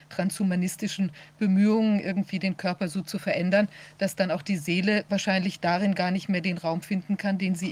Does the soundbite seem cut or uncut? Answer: uncut